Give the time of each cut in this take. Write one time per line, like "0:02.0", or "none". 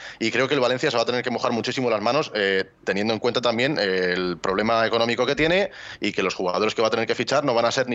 none